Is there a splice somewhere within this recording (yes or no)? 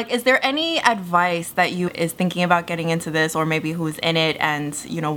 yes